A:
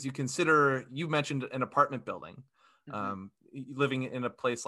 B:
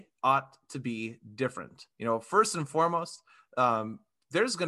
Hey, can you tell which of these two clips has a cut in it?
B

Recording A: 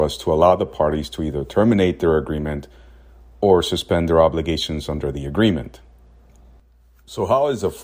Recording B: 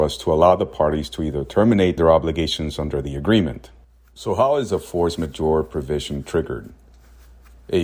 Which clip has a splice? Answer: B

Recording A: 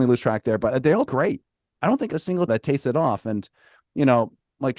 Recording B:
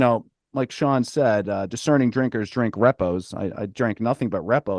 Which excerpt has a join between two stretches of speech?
A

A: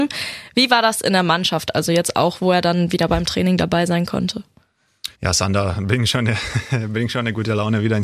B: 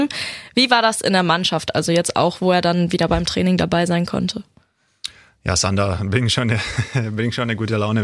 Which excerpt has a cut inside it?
A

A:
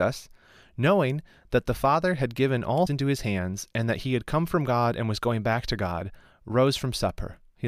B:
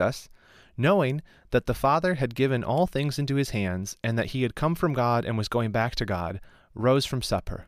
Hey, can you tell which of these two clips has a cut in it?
A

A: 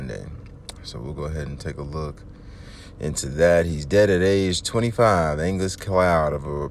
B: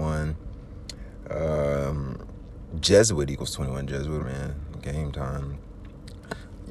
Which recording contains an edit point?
B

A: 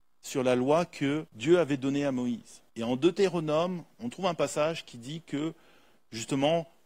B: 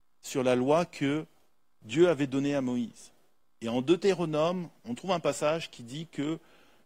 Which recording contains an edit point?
A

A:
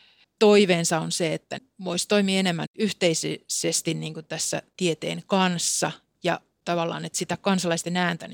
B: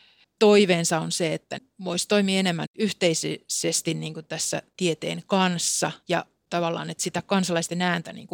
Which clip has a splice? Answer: B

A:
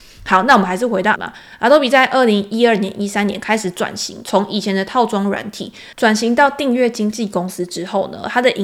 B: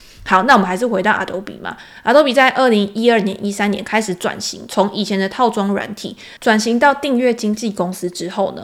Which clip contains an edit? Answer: A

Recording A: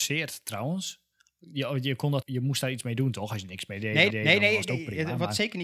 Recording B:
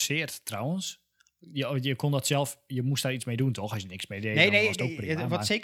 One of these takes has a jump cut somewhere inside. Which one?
A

